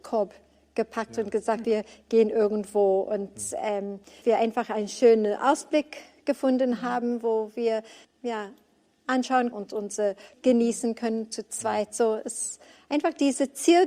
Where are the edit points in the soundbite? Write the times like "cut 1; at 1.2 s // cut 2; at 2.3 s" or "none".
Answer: cut 1; at 1.6 s // cut 2; at 4.2 s // cut 3; at 8.0 s // cut 4; at 9.5 s // cut 5; at 10.3 s